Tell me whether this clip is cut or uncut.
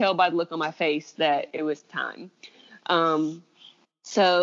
uncut